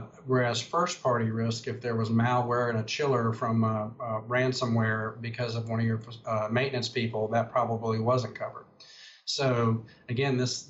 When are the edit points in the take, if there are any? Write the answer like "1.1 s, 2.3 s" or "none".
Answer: none